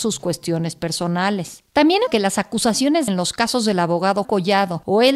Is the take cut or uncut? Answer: cut